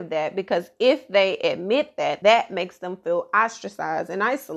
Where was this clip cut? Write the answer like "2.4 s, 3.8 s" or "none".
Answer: 2.2 s

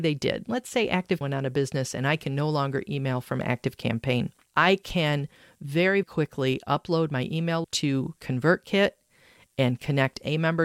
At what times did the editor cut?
1.2 s, 6.0 s, 7.6 s

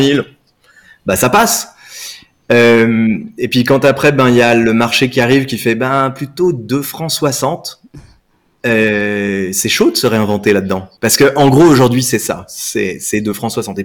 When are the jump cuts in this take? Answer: 11.0 s

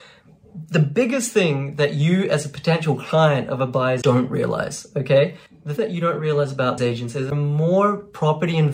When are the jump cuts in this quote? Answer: 4.0 s, 5.8 s, 6.8 s, 7.3 s

